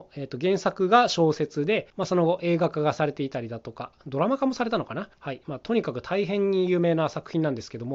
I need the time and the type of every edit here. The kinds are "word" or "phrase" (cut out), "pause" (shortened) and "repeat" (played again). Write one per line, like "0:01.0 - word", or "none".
0:01.9 - pause
0:05.1 - pause